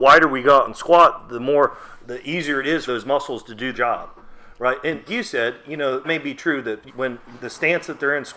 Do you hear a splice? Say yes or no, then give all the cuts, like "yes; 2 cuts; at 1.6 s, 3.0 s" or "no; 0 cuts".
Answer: yes; 7 cuts; at 2.0 s, 2.9 s, 3.7 s, 5.1 s, 6.0 s, 6.9 s, 7.4 s